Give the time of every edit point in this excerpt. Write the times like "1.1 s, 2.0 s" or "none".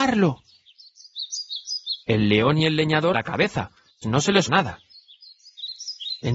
2.0 s, 3.1 s, 4.0 s, 4.5 s